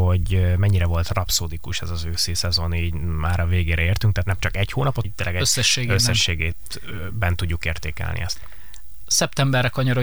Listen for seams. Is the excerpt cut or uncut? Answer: cut